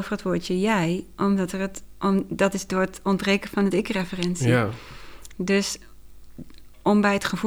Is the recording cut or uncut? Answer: uncut